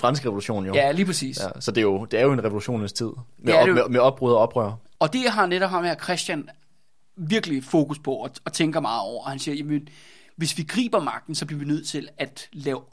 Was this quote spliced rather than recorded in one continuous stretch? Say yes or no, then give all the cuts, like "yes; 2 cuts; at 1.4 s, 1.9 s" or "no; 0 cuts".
no; 0 cuts